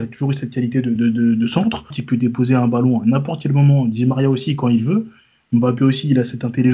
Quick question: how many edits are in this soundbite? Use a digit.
2